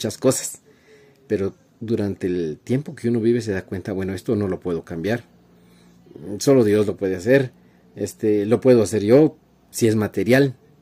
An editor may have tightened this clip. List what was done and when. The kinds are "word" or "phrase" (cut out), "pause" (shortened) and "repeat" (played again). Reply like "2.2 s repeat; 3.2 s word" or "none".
none